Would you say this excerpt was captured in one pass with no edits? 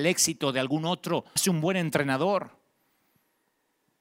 no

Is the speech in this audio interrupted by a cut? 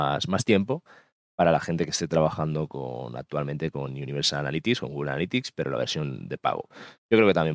no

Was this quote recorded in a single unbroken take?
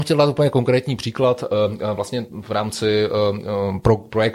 yes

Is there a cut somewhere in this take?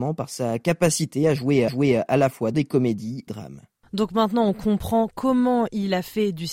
yes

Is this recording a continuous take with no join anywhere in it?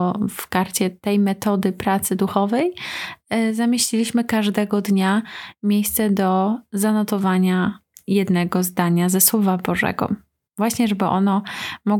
yes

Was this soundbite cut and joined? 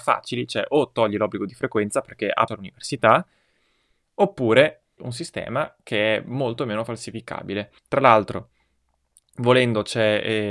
yes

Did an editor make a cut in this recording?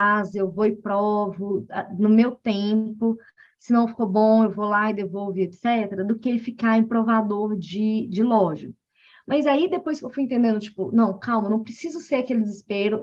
no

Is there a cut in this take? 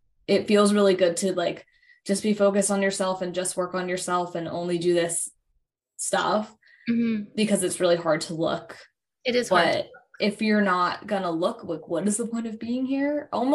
no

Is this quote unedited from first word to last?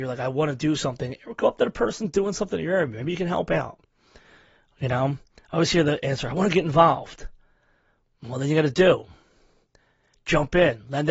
yes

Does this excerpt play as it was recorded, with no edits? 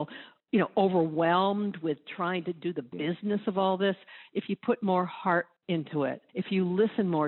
no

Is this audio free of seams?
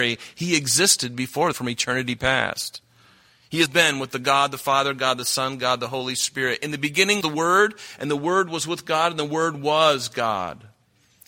no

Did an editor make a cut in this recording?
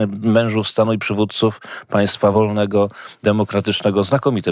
no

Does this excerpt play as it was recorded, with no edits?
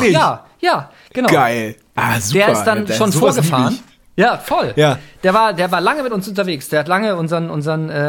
yes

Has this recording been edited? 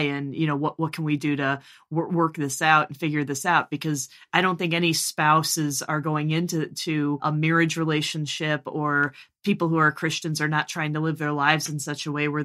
no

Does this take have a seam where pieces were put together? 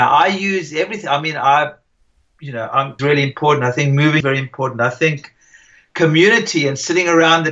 yes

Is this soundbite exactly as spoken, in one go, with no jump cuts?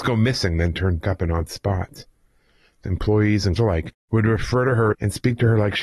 no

